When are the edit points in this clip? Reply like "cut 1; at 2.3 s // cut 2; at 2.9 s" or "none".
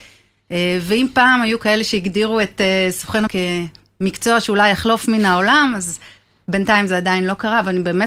cut 1; at 3.3 s